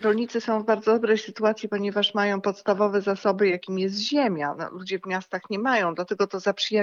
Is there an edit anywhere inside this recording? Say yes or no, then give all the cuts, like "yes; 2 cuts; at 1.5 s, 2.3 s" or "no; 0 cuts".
no; 0 cuts